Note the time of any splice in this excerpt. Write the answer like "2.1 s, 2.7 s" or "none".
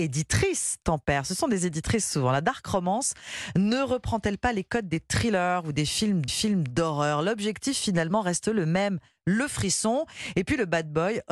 6.3 s